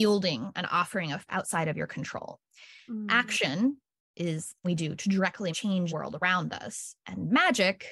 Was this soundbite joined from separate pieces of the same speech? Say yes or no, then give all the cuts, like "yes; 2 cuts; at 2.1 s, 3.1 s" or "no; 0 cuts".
yes; 4 cuts; at 1.3 s, 4.6 s, 5.5 s, 5.9 s